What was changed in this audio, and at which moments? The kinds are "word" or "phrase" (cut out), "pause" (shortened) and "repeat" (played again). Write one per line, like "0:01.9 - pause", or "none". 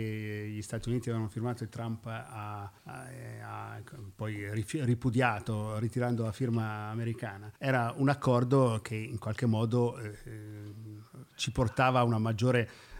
0:02.8 - pause
0:07.6 - pause